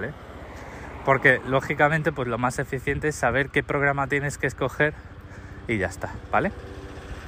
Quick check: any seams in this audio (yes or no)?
no